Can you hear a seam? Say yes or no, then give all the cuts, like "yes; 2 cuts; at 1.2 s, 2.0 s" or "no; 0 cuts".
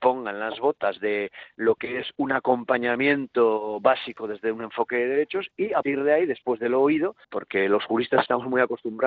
yes; 2 cuts; at 5.8 s, 7.2 s